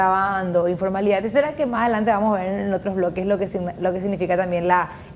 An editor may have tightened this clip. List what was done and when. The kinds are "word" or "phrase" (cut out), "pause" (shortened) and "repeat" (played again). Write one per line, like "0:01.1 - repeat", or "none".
none